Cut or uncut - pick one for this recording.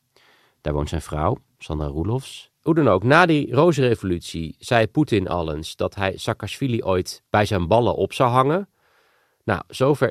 cut